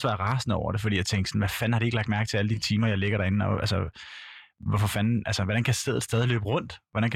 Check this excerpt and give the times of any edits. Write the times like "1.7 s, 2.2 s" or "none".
none